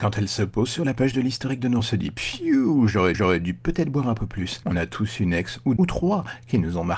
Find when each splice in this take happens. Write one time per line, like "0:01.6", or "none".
0:01.8
0:03.1
0:05.8